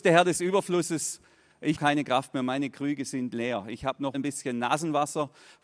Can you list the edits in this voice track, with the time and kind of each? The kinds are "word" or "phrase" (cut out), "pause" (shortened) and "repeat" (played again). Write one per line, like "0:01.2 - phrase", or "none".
0:01.7 - word
0:04.1 - word